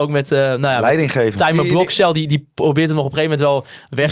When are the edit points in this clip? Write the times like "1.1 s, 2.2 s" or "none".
none